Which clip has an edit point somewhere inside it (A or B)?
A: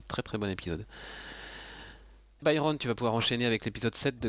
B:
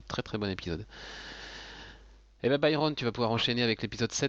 A